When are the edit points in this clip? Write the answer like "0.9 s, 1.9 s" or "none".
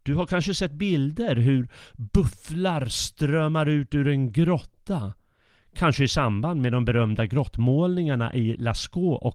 none